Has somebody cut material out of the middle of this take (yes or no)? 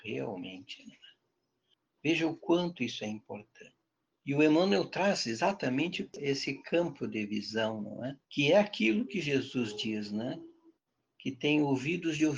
yes